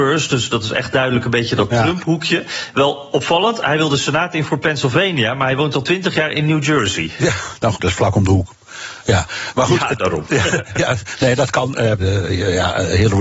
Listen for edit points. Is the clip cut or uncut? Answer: cut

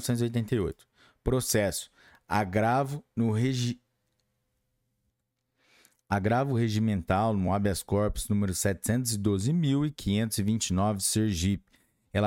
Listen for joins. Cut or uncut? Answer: uncut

